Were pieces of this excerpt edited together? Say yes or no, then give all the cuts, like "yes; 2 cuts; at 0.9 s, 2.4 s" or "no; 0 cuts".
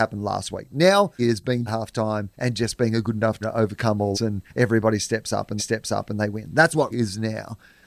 yes; 8 cuts; at 1.2 s, 1.7 s, 2.3 s, 3.4 s, 4.1 s, 4.5 s, 5.6 s, 6.9 s